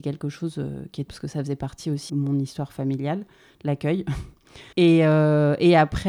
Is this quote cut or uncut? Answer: cut